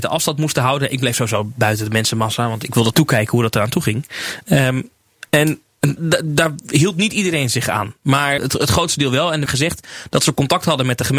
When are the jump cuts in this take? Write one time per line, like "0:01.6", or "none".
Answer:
0:02.9
0:06.0
0:08.4
0:09.5